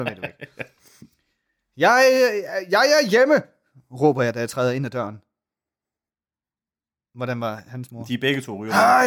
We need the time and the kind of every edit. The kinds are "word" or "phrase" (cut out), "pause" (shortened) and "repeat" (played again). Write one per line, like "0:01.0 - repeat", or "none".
none